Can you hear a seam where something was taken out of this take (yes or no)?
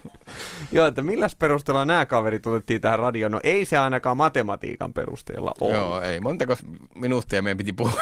no